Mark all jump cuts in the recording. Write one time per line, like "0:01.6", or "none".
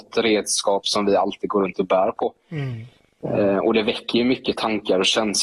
none